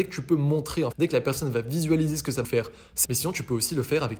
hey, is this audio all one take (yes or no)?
no